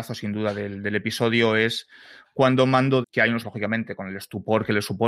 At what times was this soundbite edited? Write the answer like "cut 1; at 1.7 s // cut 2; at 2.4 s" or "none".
cut 1; at 3.0 s // cut 2; at 3.4 s